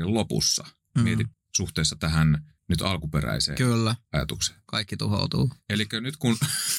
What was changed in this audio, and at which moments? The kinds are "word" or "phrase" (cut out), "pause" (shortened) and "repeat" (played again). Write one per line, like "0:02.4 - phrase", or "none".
0:01.3 - word
0:02.6 - pause